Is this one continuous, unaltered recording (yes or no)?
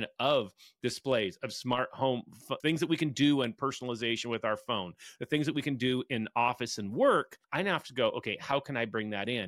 no